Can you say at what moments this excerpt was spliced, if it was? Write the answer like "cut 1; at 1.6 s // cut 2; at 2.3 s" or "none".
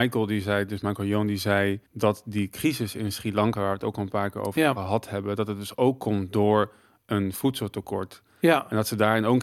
cut 1; at 1.9 s